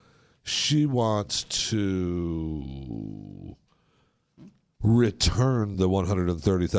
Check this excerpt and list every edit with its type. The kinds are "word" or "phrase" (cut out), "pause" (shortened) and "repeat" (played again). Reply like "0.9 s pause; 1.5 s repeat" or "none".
none